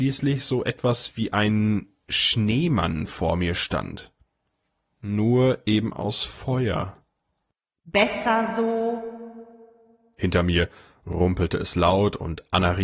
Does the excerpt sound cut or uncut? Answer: uncut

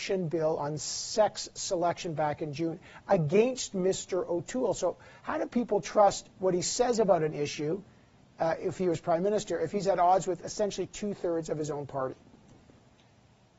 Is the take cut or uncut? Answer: uncut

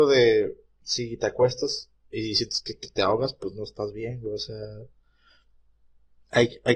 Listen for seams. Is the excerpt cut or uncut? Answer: uncut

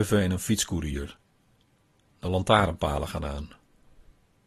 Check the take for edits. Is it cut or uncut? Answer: uncut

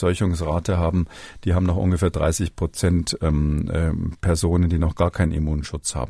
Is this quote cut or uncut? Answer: uncut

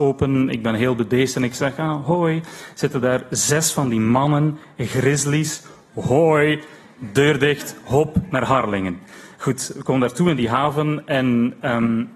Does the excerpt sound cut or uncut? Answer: uncut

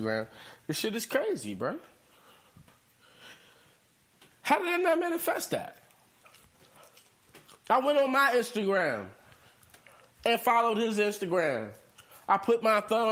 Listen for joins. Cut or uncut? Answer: uncut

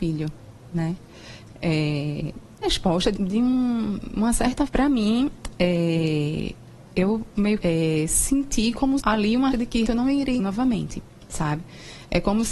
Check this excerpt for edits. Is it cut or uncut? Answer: cut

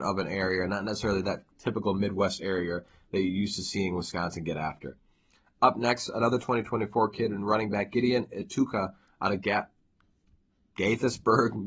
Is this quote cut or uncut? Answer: uncut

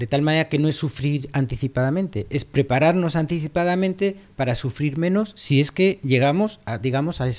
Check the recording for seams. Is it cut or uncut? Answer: uncut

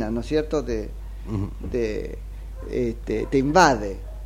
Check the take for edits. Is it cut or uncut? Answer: uncut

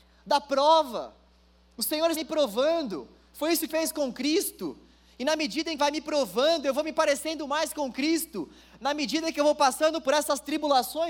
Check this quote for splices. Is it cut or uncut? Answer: cut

